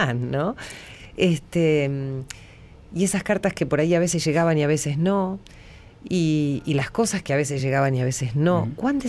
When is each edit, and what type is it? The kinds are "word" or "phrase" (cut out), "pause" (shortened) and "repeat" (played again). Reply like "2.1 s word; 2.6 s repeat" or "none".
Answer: none

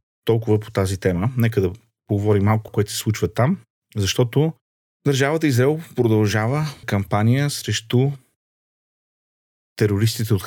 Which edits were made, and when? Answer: 2.7 s phrase; 6.8 s word

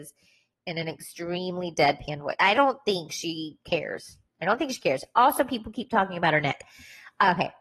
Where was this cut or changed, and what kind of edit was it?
2.5 s word

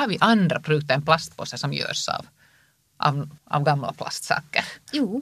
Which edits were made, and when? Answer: 3.4 s pause

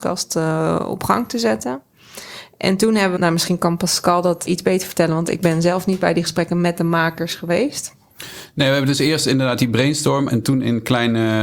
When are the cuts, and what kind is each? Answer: 3.2 s word; 4.5 s word; 10.3 s word

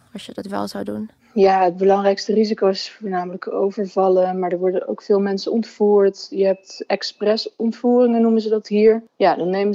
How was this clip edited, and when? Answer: none

